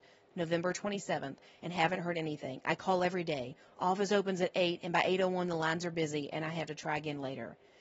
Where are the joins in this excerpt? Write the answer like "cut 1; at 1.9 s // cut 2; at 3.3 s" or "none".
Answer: none